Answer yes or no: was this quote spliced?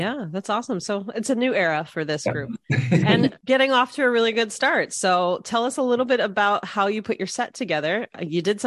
no